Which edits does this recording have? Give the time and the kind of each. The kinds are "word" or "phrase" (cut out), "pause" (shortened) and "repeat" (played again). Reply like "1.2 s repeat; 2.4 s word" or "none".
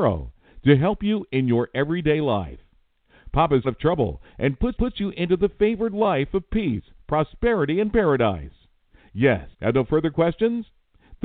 3.6 s phrase; 4.8 s repeat; 9.5 s pause